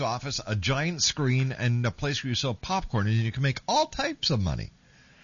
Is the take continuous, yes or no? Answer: yes